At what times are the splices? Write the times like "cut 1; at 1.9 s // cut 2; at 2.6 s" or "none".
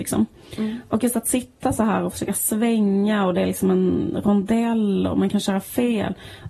none